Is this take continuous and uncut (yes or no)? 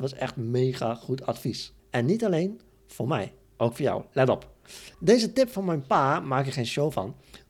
no